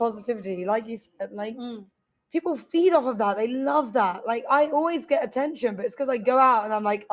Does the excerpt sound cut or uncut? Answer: uncut